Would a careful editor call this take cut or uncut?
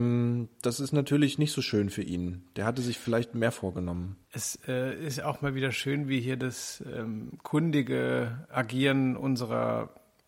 cut